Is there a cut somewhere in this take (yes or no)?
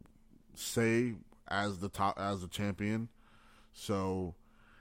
no